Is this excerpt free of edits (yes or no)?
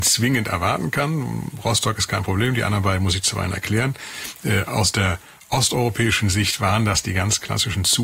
yes